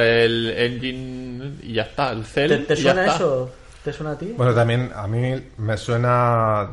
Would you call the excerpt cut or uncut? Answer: uncut